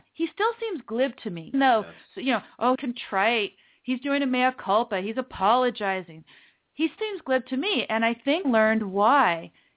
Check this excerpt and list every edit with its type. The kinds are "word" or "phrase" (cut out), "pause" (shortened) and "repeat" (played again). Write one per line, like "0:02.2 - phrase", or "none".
0:01.5 - word
0:02.7 - word
0:07.0 - word
0:08.4 - word